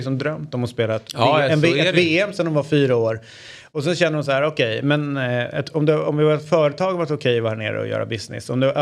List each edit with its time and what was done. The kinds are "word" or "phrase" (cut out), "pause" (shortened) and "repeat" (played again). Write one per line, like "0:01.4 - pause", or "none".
none